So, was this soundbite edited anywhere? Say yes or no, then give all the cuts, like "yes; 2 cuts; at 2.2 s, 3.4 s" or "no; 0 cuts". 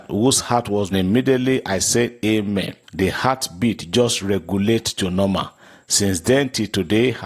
yes; 2 cuts; at 0.9 s, 2.8 s